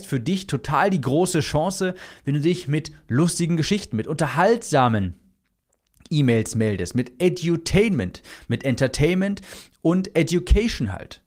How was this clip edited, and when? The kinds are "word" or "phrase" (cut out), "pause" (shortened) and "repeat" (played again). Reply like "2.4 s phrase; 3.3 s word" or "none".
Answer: none